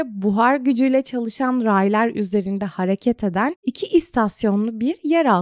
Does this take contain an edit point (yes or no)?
no